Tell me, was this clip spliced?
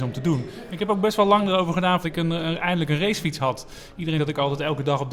yes; 2 cuts; at 2.0 s, 4.2 s

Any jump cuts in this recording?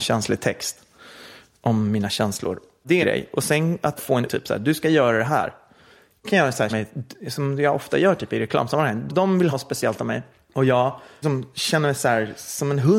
yes; 8 cuts; at 3.0 s, 4.0 s, 4.3 s, 6.2 s, 6.7 s, 9.1 s, 9.5 s, 11.2 s

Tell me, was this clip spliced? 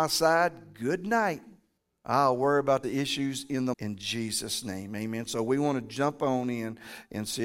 yes; 3 cuts; at 1.8 s, 2.8 s, 3.7 s

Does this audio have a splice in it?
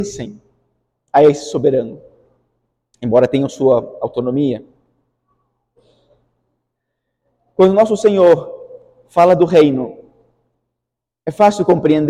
no; 0 cuts

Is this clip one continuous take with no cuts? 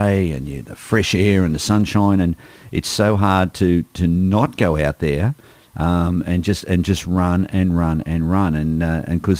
yes; 0 cuts

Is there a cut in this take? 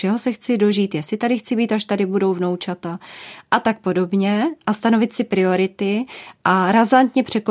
no; 0 cuts

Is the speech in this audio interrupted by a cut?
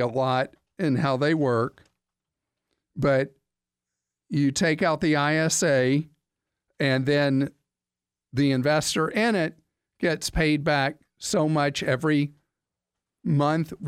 no; 0 cuts

